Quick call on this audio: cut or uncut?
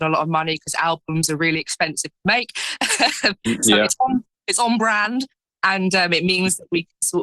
uncut